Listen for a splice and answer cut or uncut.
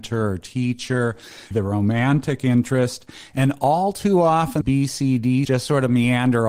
cut